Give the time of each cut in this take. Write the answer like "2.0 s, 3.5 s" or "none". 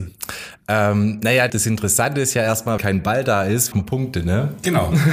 1.5 s, 2.8 s, 3.7 s